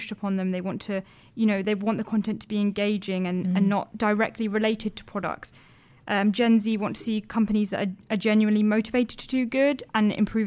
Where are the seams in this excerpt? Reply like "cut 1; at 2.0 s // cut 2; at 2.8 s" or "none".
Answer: none